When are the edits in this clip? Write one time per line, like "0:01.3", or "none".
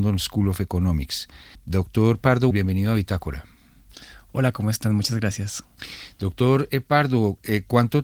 0:01.5
0:02.5